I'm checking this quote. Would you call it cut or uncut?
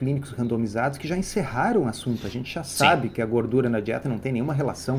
uncut